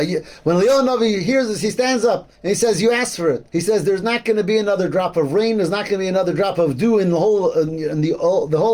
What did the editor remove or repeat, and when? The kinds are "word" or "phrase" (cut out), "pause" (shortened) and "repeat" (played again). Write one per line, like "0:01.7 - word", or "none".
0:02.3 - pause
0:03.5 - pause